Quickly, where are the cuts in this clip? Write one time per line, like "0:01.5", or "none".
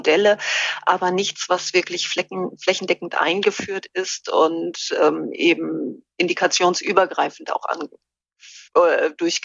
none